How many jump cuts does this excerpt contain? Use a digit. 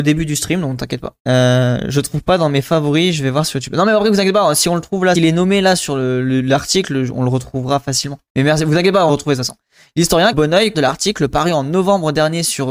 6